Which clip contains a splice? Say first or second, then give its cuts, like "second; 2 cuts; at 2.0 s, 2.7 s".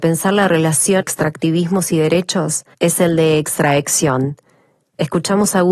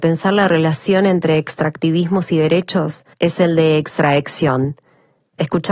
first; 1 cut; at 1.0 s